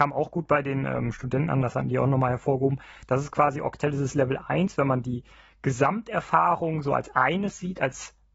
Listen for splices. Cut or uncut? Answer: uncut